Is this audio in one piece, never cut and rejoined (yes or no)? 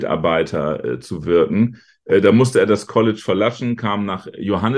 yes